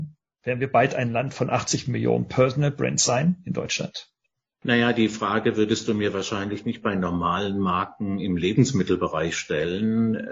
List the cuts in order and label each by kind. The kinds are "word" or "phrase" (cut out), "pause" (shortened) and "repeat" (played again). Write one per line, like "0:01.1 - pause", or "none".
none